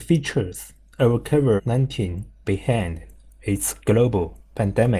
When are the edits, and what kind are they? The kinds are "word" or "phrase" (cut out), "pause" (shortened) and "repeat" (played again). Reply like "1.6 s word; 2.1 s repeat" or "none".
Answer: 1.6 s phrase; 2.4 s word